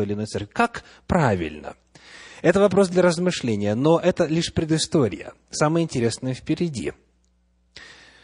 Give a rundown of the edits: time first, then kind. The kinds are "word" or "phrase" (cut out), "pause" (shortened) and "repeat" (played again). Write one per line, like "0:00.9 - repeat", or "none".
none